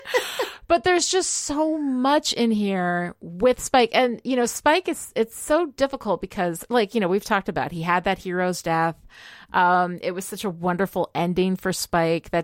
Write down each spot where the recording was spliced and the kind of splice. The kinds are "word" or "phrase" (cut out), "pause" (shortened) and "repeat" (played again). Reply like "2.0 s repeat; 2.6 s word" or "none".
none